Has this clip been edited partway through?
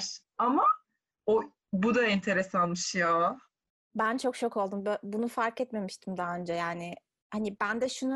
no; 0 cuts

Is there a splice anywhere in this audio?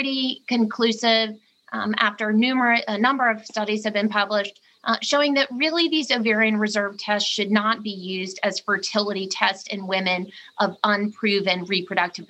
no; 0 cuts

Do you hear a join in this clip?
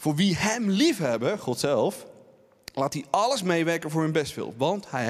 no; 0 cuts

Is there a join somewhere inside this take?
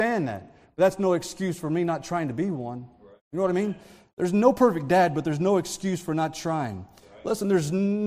no; 0 cuts

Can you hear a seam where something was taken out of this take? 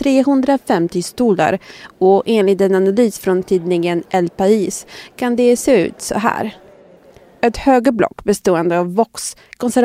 no; 0 cuts

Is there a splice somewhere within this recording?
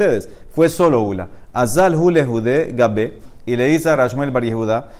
no; 0 cuts

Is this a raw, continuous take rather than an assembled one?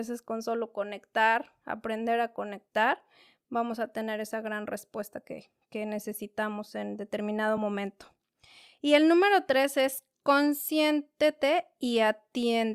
yes; 0 cuts

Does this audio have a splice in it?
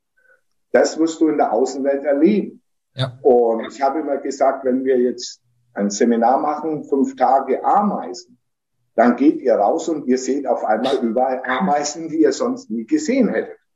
no; 0 cuts

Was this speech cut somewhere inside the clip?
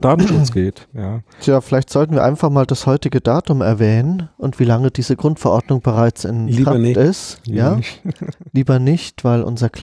no; 0 cuts

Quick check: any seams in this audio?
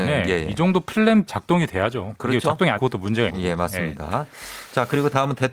yes; 3 cuts; at 1.3 s, 2.8 s, 3.3 s

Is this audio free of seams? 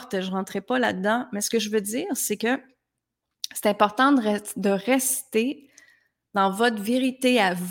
yes; 0 cuts

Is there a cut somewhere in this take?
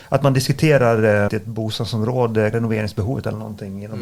yes; 2 cuts; at 1.3 s, 2.5 s

